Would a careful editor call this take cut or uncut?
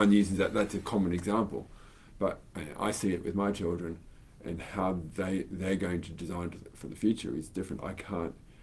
uncut